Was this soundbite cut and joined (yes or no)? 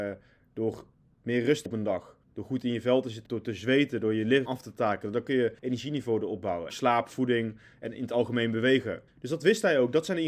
yes